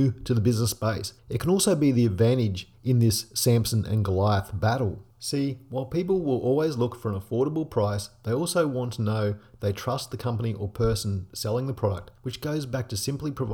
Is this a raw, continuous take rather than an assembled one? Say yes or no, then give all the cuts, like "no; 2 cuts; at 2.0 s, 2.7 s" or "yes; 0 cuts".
no; 4 cuts; at 1.2 s, 2.7 s, 5.1 s, 12.2 s